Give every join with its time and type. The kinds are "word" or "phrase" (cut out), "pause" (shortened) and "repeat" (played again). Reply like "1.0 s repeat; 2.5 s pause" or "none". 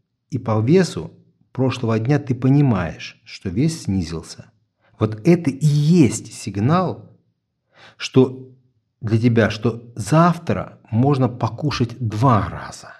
none